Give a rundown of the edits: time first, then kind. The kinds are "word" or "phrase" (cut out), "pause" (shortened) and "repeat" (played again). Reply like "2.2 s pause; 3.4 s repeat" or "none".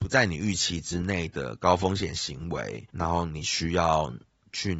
2.9 s pause